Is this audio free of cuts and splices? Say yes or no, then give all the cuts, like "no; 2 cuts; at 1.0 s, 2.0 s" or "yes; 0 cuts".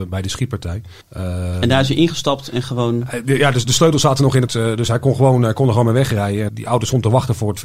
no; 3 cuts; at 1.0 s, 4.5 s, 6.5 s